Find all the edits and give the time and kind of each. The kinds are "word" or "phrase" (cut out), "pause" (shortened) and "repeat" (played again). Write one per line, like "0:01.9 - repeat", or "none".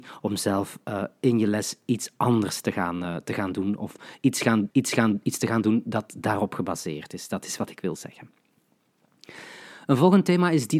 0:04.7 - repeat